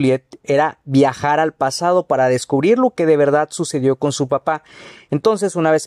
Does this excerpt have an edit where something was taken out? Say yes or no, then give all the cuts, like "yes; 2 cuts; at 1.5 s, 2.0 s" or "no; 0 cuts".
no; 0 cuts